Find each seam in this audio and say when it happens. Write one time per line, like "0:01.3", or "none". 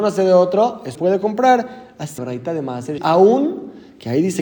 0:00.9
0:02.2
0:03.0